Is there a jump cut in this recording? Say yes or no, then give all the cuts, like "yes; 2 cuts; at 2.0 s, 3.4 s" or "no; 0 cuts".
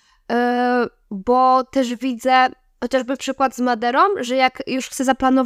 no; 0 cuts